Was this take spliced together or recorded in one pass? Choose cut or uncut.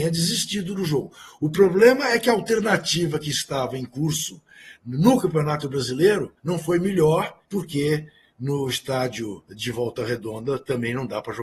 cut